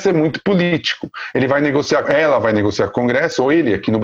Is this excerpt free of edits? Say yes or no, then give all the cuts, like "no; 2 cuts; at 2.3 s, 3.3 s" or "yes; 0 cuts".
no; 1 cut; at 2.0 s